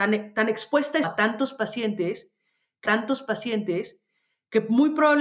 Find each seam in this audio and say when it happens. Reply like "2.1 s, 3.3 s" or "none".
1.0 s, 2.8 s